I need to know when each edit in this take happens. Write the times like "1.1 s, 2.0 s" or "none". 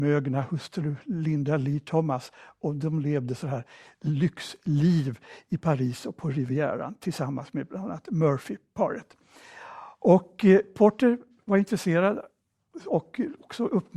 none